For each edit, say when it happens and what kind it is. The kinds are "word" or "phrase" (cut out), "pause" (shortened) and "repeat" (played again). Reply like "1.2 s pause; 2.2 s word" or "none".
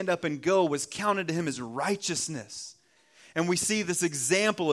none